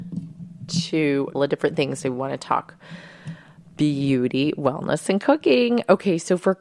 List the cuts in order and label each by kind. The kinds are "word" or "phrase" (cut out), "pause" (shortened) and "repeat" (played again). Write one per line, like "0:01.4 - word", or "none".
0:01.3 - word